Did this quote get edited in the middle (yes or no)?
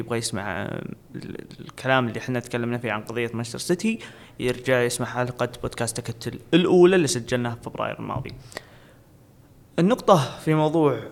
no